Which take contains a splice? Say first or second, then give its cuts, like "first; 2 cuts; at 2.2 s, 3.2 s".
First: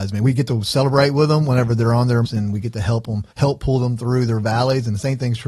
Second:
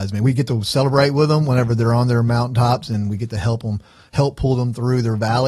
first; 2 cuts; at 2.2 s, 3.3 s